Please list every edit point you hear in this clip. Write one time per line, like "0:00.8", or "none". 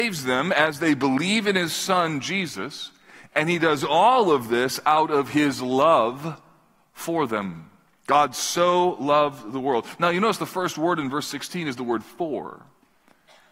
none